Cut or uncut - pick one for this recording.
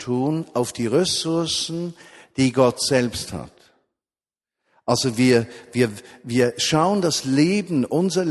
uncut